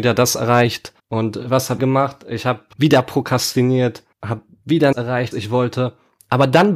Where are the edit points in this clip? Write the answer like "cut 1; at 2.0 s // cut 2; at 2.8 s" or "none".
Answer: cut 1; at 1.0 s // cut 2; at 1.8 s // cut 3; at 2.7 s // cut 4; at 4.1 s // cut 5; at 4.9 s // cut 6; at 5.3 s